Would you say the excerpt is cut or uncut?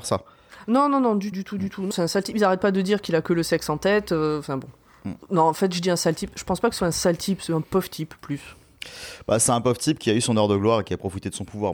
cut